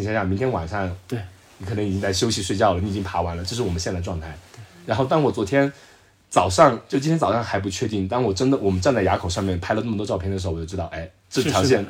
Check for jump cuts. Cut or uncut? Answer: uncut